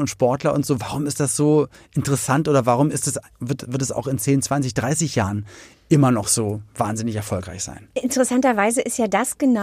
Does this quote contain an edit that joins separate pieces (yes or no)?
no